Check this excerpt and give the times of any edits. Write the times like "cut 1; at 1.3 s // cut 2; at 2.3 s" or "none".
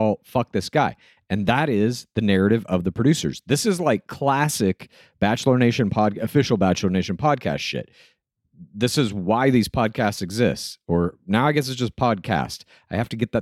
none